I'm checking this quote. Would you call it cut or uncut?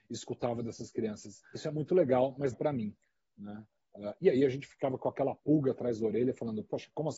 cut